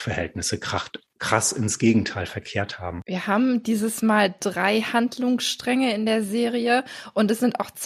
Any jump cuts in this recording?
no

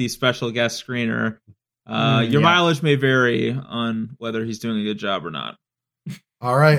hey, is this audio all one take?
yes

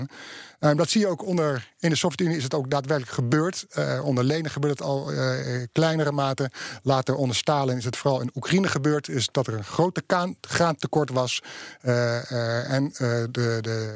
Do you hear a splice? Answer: no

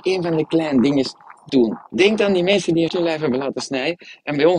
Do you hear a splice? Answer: yes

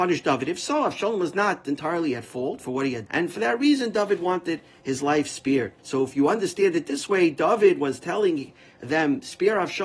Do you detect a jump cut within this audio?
yes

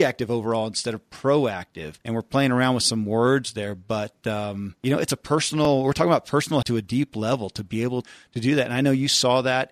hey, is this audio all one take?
no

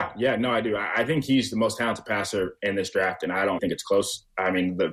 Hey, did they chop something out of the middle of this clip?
yes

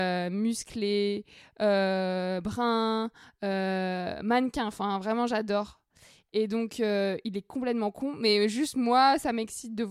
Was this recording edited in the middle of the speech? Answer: no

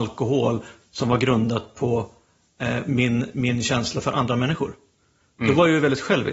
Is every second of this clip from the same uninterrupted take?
yes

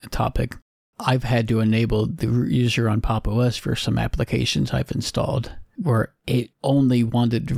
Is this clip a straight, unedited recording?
no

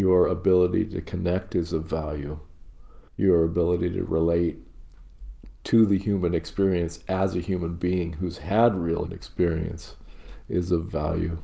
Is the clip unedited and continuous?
no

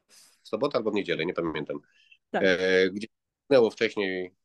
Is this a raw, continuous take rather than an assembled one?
yes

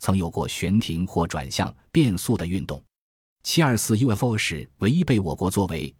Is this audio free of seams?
yes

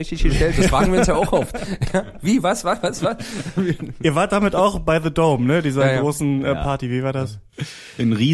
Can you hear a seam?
no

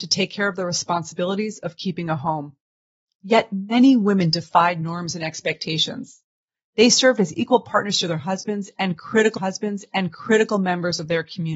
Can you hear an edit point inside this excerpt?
yes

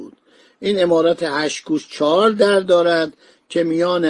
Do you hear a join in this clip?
no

